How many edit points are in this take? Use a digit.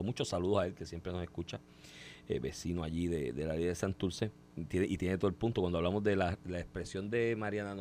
0